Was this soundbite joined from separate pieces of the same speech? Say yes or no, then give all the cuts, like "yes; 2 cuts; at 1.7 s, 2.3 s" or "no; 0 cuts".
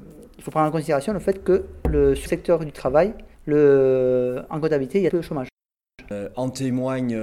yes; 3 cuts; at 2.3 s, 3.3 s, 5.1 s